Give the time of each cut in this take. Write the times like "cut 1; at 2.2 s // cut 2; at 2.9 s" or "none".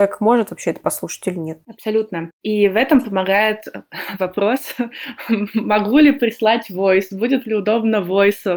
cut 1; at 1.6 s

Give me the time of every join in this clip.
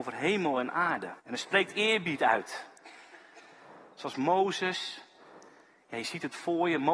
cut 1; at 1.2 s

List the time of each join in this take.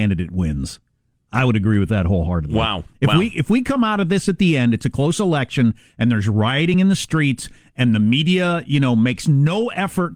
none

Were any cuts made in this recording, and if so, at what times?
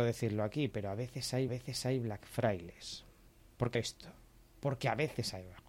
cut 1; at 1.5 s // cut 2; at 3.4 s // cut 3; at 3.7 s

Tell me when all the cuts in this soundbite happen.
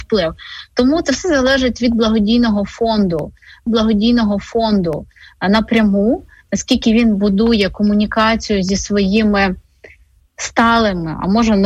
cut 1; at 3.7 s

